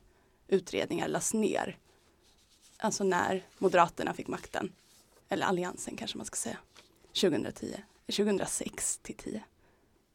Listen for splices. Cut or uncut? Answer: uncut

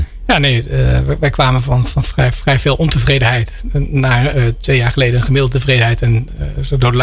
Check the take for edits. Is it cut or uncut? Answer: uncut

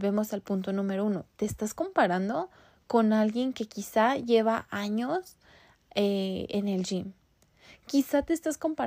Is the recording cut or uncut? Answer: uncut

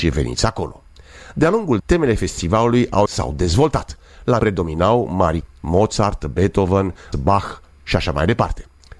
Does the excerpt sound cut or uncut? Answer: cut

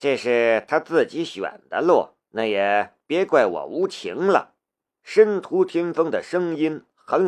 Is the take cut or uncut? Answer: cut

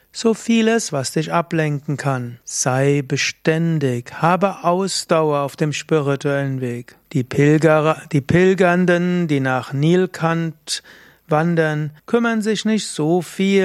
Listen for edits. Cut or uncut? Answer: cut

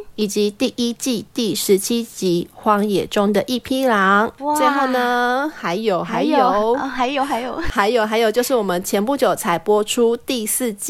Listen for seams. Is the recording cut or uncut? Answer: uncut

